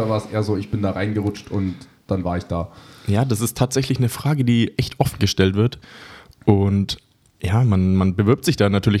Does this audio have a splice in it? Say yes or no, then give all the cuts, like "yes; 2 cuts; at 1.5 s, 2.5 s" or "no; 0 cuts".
no; 0 cuts